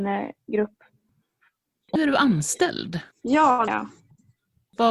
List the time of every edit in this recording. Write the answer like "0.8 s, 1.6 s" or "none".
2.0 s, 3.1 s, 3.7 s